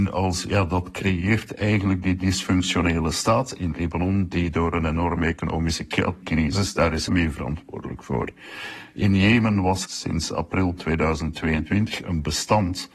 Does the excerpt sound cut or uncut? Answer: cut